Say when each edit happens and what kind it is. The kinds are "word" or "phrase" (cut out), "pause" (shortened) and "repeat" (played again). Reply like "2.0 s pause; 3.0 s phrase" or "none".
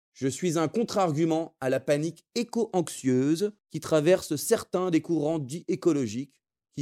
3.6 s pause